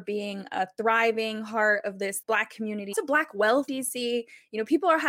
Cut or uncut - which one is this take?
cut